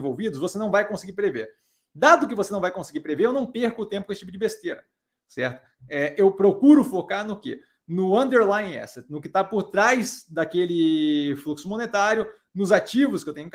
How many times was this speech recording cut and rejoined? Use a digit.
0